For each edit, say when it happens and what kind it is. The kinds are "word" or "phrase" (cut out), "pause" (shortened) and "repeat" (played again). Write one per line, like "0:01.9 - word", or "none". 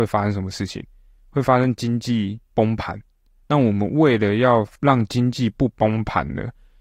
0:04.8 - pause